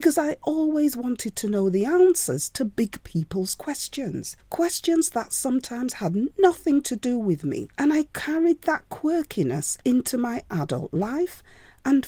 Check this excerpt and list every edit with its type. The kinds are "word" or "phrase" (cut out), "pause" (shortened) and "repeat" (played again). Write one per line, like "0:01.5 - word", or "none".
0:04.4 - pause
0:07.7 - pause
0:09.8 - pause